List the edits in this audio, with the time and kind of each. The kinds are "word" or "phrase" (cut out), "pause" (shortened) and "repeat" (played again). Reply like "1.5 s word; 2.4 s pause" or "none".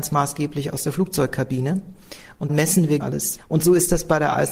2.5 s word; 3.0 s word